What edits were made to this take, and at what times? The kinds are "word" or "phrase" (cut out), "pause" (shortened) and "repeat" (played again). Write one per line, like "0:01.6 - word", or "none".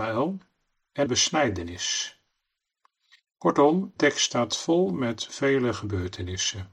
0:01.1 - phrase
0:04.0 - word